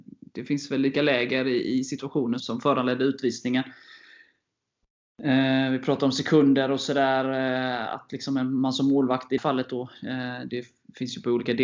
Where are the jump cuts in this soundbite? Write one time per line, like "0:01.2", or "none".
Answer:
0:00.9
0:02.4
0:09.4